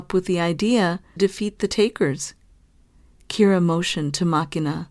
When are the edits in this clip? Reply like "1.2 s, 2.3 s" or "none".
1.2 s

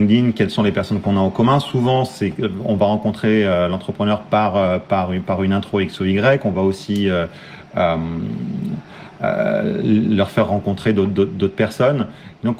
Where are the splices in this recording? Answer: none

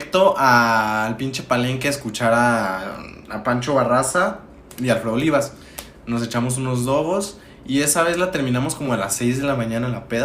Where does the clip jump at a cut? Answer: none

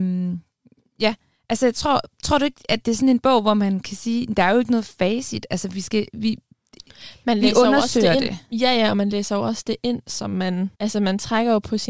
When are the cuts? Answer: 10.7 s

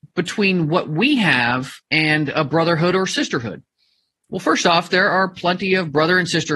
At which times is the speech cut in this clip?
none

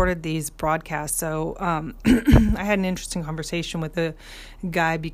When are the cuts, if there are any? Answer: none

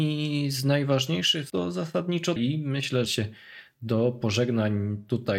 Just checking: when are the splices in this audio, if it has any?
1.5 s, 2.4 s, 3.1 s

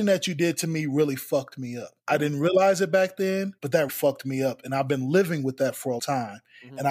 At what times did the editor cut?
2.0 s, 3.6 s, 3.9 s, 6.0 s

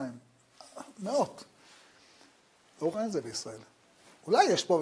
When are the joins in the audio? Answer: 2.9 s

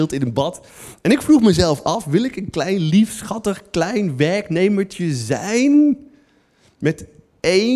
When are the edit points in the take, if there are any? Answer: none

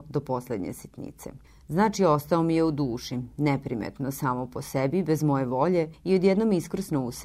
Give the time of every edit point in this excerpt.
1.4 s

